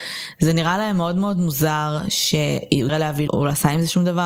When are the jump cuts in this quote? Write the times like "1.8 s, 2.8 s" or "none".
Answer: 2.9 s, 3.3 s